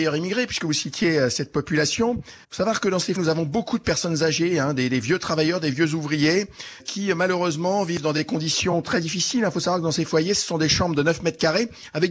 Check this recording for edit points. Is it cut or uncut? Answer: cut